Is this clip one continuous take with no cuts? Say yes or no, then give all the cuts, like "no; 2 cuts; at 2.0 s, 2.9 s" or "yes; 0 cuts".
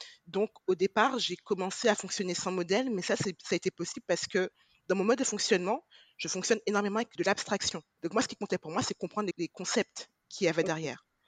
no; 1 cut; at 9.3 s